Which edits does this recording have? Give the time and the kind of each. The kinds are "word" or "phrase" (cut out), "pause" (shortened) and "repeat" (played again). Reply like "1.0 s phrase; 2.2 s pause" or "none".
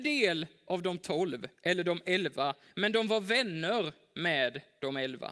none

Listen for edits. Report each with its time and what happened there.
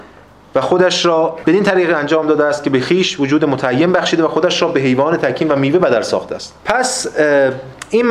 6.6 s pause

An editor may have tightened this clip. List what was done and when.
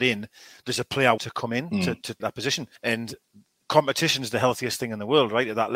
1.2 s word; 2.2 s phrase; 2.8 s pause

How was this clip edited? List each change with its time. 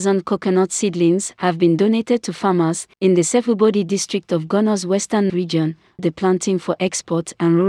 2.9 s pause; 5.3 s word; 6.0 s word

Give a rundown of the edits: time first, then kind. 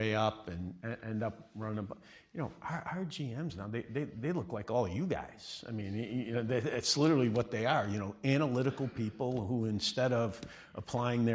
none

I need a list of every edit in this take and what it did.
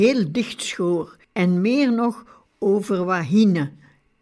1.2 s pause

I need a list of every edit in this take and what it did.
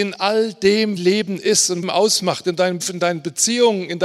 1.0 s word; 1.8 s phrase; 2.8 s word

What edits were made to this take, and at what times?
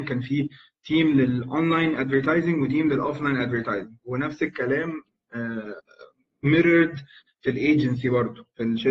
none

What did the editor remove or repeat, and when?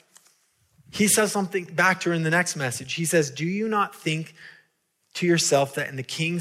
none

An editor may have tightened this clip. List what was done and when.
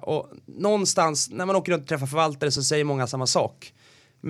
none

